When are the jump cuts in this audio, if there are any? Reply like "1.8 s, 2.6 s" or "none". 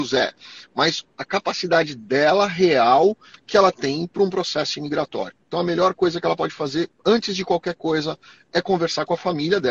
none